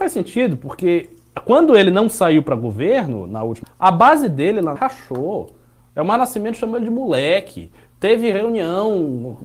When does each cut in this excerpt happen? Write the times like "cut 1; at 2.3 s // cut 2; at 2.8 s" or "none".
cut 1; at 3.6 s // cut 2; at 4.8 s